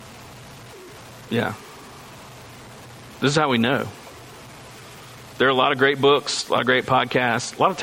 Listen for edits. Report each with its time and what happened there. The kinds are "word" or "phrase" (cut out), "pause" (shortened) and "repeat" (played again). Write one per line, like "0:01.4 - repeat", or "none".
none